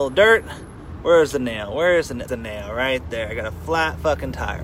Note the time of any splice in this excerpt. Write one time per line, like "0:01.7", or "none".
0:02.3